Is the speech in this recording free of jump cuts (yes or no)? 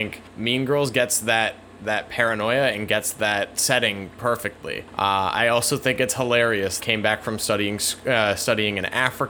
no